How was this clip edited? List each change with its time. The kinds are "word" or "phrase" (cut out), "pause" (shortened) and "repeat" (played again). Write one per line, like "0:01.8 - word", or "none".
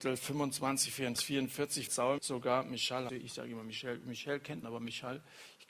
0:01.1 - word
0:01.9 - word
0:02.2 - word
0:03.1 - word
0:04.6 - word